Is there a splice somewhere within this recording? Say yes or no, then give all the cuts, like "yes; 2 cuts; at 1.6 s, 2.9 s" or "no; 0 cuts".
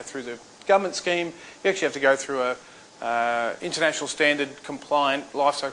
no; 0 cuts